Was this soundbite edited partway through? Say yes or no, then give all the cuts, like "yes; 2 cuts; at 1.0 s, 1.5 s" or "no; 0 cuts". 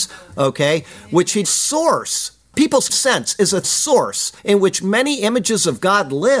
yes; 4 cuts; at 1.4 s, 2.9 s, 3.6 s, 4.4 s